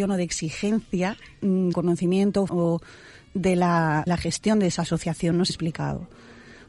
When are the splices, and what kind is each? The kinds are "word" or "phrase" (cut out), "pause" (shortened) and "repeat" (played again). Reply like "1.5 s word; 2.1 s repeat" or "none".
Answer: 1.7 s word; 2.5 s word; 4.1 s word; 5.5 s phrase